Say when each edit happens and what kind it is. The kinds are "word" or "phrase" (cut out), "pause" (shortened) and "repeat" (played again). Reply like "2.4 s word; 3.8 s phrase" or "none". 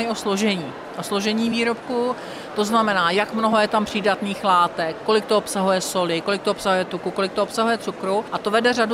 none